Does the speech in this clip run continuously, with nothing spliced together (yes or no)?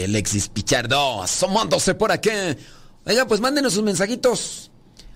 yes